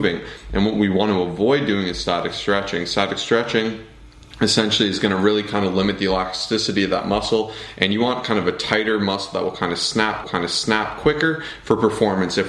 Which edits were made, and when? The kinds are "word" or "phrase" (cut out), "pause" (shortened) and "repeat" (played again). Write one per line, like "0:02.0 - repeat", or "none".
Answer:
0:10.2 - repeat